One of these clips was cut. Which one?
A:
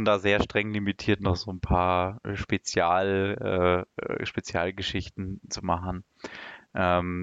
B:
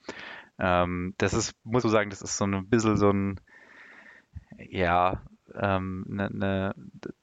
B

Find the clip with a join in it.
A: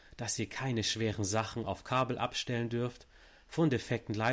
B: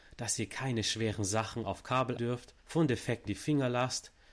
B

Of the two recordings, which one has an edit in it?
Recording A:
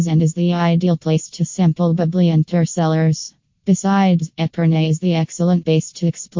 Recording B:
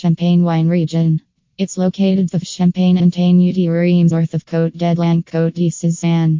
B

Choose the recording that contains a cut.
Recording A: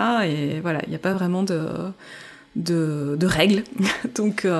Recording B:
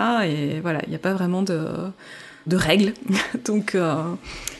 B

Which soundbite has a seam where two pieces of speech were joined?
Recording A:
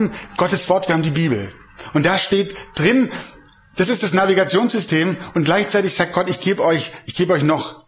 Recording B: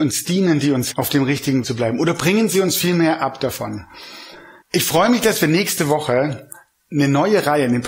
B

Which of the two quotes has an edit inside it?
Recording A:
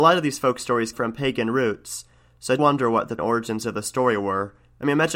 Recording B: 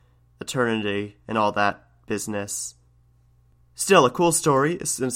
A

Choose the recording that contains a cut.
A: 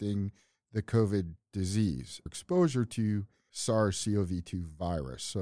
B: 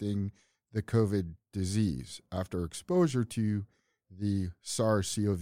A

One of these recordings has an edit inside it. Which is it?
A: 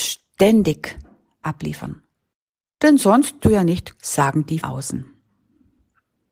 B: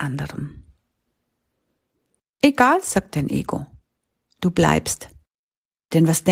A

